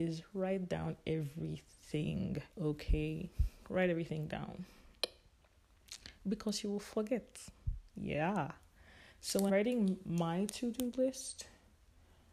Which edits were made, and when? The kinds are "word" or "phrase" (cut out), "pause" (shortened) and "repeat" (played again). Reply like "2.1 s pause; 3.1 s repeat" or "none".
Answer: 2.5 s pause; 9.5 s word